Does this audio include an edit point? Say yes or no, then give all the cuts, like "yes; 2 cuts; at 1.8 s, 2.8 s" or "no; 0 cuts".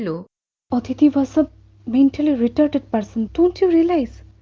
yes; 1 cut; at 3.3 s